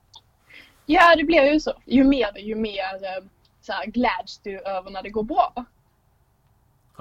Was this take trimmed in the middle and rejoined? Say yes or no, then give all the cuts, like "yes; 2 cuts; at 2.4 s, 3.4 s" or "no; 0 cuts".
yes; 3 cuts; at 1.8 s, 2.3 s, 3.3 s